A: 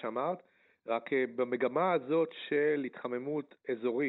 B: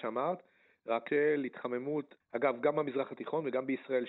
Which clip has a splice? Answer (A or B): B